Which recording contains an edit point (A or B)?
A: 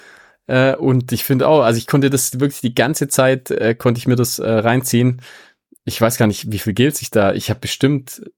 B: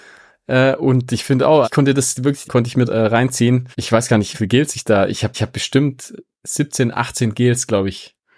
B